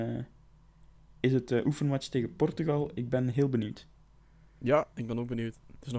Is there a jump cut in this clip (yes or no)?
no